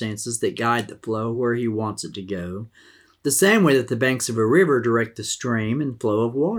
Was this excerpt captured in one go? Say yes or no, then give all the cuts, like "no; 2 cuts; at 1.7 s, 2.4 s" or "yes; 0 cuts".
yes; 0 cuts